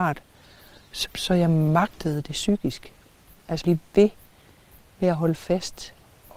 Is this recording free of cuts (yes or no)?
no